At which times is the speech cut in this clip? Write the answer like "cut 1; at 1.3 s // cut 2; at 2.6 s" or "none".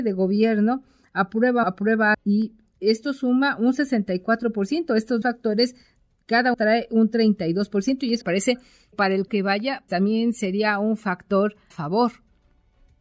cut 1; at 1.6 s // cut 2; at 2.1 s // cut 3; at 5.2 s // cut 4; at 6.5 s // cut 5; at 8.2 s // cut 6; at 8.9 s // cut 7; at 9.3 s // cut 8; at 9.9 s // cut 9; at 11.7 s